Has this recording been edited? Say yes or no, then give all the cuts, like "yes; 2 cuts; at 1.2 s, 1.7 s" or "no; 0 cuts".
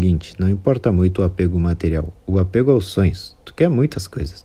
no; 0 cuts